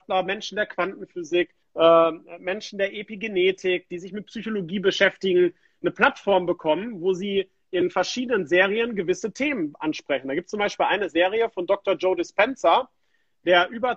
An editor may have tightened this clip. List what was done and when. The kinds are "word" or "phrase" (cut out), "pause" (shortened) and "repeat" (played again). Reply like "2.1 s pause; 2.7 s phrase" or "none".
1.6 s pause